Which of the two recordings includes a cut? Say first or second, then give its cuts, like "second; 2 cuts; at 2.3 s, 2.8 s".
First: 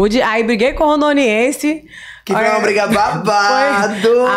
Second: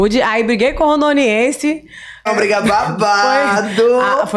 second; 1 cut; at 2.3 s